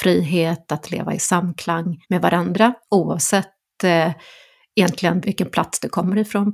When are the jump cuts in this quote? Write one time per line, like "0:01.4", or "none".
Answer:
0:02.0
0:02.8
0:05.2